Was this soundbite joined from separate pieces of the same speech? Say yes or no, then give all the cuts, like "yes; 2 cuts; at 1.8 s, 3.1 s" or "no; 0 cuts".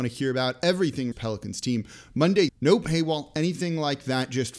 yes; 2 cuts; at 1.1 s, 2.5 s